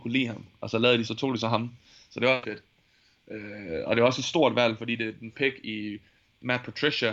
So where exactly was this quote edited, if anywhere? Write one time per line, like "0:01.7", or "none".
0:01.0
0:02.4
0:05.3